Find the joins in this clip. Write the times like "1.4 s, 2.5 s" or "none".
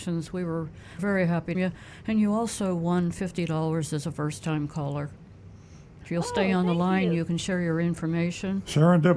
1.0 s, 1.5 s